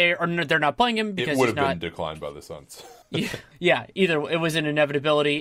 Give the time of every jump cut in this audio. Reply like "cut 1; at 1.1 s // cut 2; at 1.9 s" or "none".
none